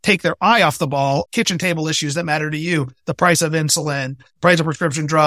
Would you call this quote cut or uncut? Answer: cut